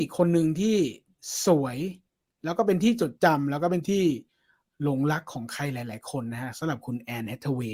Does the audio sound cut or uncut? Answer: uncut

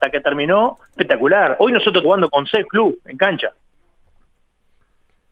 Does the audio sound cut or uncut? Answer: cut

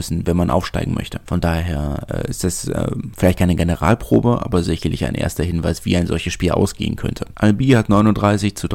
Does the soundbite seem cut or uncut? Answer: uncut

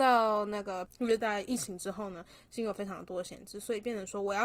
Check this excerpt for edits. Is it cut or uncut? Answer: uncut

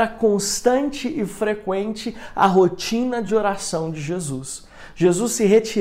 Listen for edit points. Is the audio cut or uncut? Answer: uncut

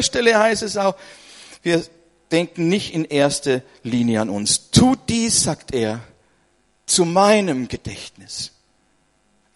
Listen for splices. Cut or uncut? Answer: uncut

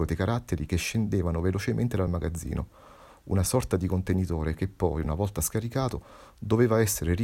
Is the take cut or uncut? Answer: uncut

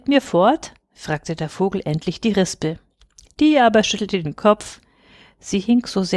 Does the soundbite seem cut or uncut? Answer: uncut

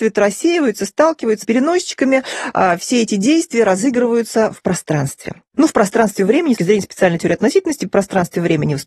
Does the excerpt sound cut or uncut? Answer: cut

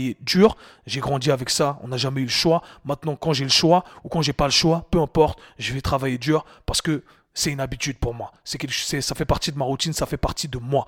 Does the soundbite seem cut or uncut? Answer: uncut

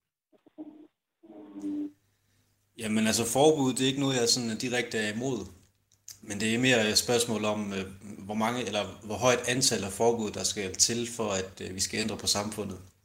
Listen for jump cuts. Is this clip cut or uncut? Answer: uncut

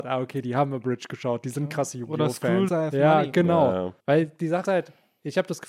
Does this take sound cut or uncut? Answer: cut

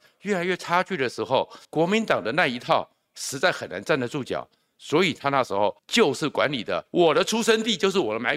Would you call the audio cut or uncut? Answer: cut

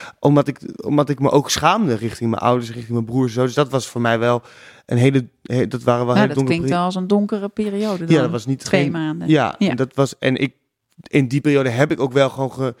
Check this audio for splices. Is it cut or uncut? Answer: uncut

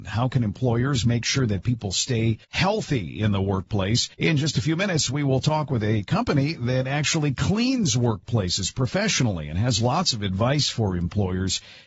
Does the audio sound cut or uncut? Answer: cut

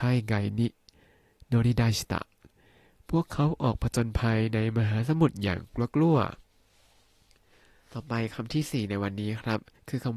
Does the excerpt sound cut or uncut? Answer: cut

